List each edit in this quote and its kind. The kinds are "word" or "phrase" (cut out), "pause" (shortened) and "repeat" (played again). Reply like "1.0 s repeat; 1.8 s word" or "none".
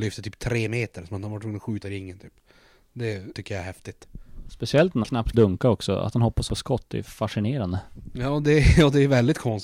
1.8 s word; 3.3 s word; 5.0 s word; 5.3 s word; 6.5 s word; 7.0 s word